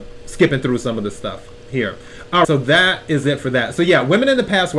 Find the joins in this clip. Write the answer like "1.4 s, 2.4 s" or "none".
2.4 s